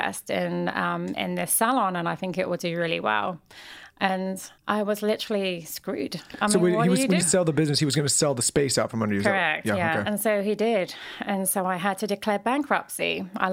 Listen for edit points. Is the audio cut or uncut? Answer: cut